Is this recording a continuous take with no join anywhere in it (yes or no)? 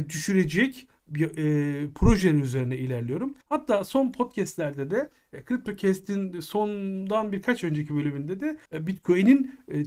no